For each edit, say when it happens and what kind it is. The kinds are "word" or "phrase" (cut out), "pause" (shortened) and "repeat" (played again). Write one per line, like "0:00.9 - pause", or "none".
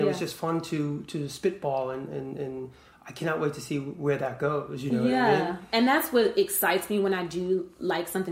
none